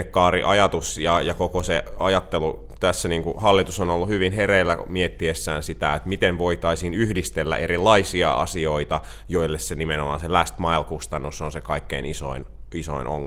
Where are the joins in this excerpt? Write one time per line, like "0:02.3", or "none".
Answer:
none